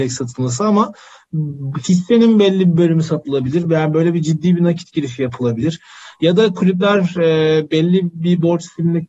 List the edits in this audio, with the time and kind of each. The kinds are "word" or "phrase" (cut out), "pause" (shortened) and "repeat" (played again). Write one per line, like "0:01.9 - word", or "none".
none